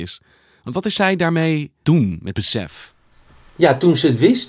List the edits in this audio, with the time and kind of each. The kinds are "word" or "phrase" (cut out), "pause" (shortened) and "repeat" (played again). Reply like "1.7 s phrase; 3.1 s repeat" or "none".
1.8 s word; 2.3 s word